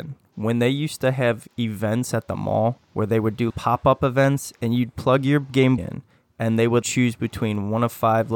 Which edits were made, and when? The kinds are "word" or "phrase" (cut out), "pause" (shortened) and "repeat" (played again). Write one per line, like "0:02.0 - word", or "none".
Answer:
0:02.8 - pause
0:03.5 - word
0:05.8 - word
0:06.8 - phrase